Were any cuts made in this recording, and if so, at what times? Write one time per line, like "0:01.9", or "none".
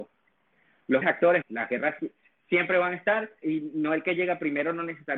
0:01.0
0:01.4
0:03.4